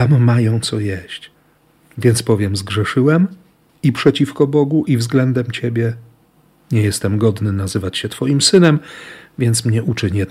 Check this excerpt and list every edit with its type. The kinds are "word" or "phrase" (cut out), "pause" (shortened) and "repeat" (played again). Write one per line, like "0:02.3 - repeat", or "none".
none